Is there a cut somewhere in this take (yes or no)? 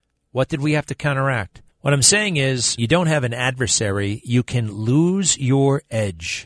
yes